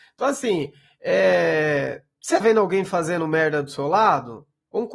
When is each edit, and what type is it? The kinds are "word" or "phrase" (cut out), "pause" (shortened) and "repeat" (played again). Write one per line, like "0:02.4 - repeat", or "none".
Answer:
0:02.4 - word